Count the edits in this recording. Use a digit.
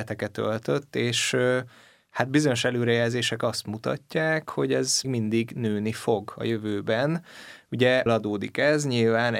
2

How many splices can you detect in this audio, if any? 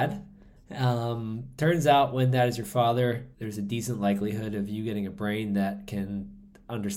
1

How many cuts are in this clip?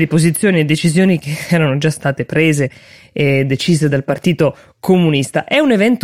0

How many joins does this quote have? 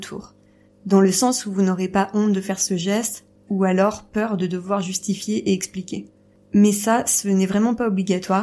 0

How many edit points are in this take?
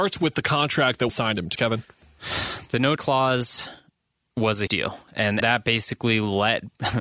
5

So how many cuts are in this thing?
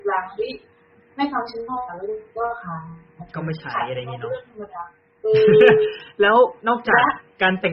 3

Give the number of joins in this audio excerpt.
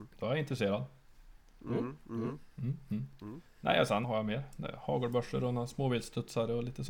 1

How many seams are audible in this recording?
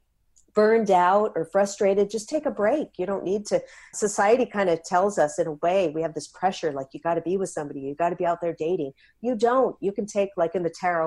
1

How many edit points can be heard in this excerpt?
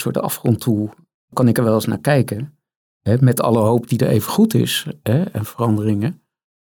1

